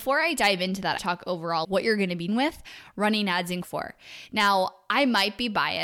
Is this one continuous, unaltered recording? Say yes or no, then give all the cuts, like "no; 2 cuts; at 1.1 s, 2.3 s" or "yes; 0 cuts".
no; 4 cuts; at 1.0 s, 1.6 s, 2.3 s, 3.6 s